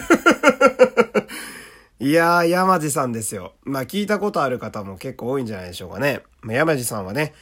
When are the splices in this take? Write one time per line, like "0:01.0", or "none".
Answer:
none